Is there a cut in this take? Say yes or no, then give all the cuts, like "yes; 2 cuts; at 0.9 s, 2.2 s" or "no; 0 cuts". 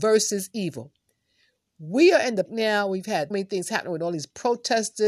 yes; 2 cuts; at 2.5 s, 3.3 s